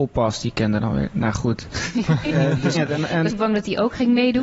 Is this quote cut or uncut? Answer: cut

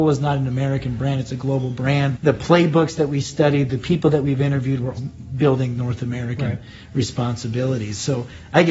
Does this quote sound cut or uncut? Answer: cut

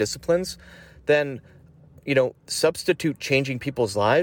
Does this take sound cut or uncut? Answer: uncut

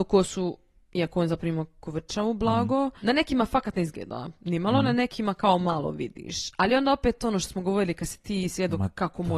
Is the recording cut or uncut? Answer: uncut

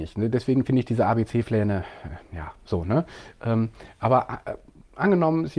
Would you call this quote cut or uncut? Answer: uncut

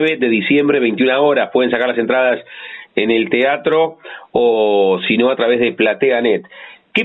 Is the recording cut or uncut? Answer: uncut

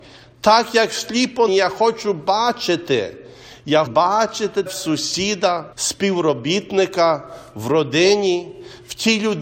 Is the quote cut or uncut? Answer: cut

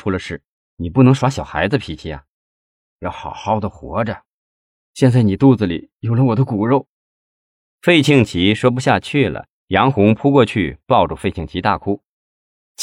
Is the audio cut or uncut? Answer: uncut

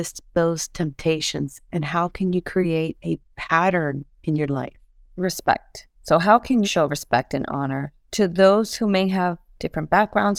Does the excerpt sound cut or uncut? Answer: cut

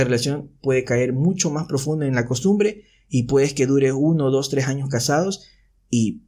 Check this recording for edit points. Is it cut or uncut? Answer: uncut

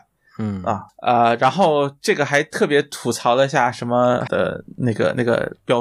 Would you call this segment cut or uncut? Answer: cut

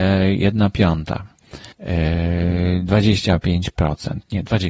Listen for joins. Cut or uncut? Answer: cut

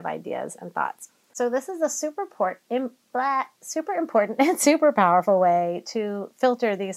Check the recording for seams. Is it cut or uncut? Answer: uncut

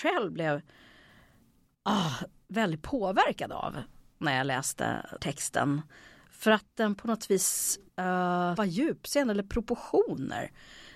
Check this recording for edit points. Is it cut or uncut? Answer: cut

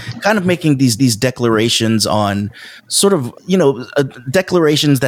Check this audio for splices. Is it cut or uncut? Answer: cut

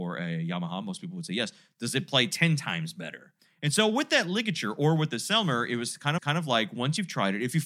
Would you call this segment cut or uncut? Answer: cut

